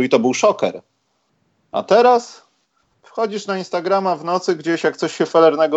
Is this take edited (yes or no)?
no